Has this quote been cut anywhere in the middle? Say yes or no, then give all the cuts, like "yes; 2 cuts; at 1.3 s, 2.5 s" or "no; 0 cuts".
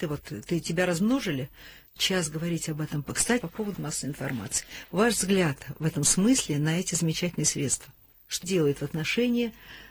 yes; 4 cuts; at 2.0 s, 3.4 s, 3.7 s, 8.4 s